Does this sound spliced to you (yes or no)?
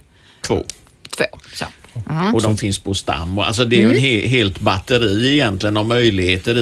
yes